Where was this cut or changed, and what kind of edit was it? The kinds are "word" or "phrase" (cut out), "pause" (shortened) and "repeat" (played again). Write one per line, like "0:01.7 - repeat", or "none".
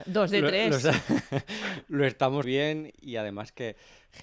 0:02.4 - word
0:02.9 - word